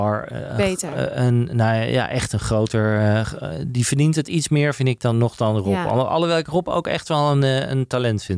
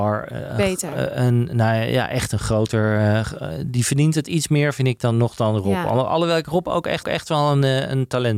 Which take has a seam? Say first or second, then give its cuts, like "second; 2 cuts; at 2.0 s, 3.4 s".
second; 1 cut; at 7.0 s